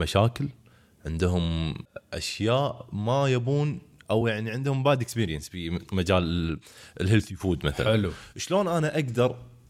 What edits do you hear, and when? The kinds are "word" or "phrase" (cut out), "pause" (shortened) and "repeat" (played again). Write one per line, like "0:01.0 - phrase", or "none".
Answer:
none